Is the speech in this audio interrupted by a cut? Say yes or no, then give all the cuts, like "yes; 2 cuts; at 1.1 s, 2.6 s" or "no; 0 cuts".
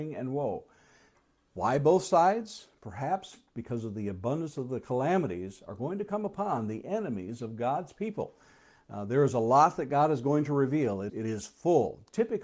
yes; 1 cut; at 11.1 s